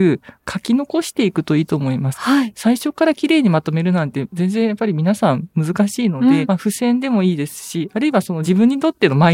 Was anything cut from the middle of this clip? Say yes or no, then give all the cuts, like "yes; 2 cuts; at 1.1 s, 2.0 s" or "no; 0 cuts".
yes; 1 cut; at 6.5 s